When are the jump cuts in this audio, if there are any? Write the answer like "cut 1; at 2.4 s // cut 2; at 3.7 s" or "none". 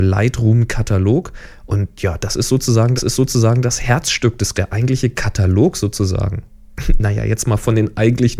cut 1; at 3.0 s // cut 2; at 4.5 s